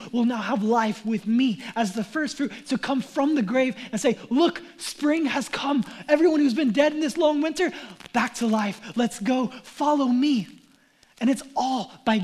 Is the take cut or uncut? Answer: uncut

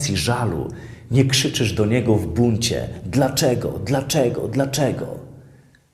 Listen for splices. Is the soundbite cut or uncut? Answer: uncut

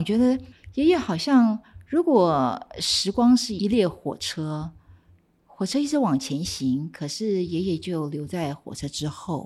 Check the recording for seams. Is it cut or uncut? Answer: uncut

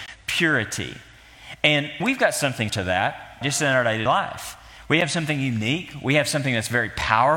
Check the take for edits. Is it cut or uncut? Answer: cut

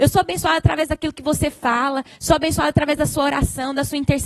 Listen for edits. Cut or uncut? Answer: uncut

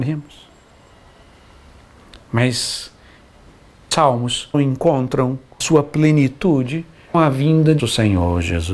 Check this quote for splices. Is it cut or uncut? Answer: cut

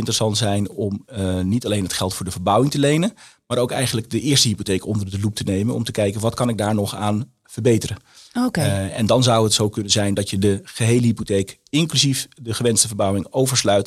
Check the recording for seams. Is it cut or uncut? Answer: uncut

